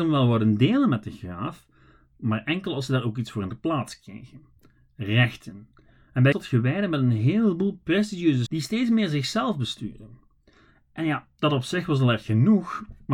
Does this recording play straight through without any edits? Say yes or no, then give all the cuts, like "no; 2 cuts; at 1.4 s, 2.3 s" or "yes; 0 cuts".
no; 2 cuts; at 6.3 s, 8.5 s